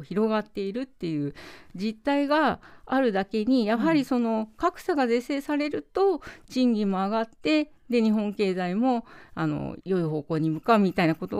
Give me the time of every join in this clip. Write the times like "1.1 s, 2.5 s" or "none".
9.8 s